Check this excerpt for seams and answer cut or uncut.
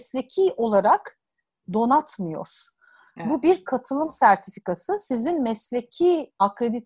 uncut